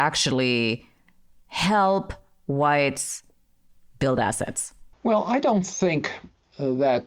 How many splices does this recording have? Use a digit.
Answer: 1